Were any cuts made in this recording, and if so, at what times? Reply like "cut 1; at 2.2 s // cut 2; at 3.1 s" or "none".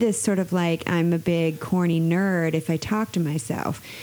none